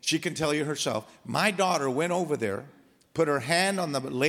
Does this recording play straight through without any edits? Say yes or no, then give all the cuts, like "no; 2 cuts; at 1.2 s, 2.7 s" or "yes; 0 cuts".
yes; 0 cuts